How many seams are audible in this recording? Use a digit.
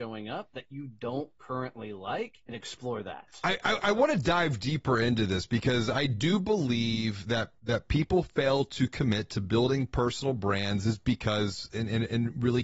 2